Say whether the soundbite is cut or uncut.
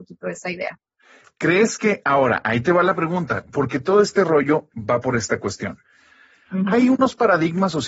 uncut